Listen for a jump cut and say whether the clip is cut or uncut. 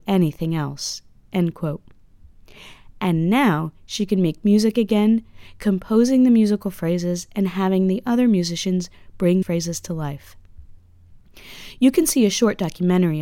cut